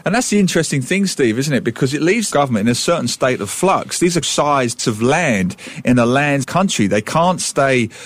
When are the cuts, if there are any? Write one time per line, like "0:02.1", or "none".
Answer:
0:02.3
0:04.2
0:04.8
0:06.4